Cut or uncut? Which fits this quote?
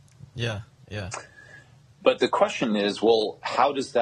uncut